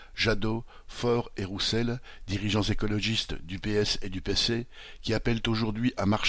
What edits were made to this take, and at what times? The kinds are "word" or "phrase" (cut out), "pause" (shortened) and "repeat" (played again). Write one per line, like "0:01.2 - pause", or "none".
none